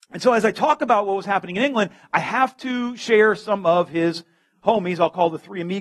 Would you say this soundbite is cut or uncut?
uncut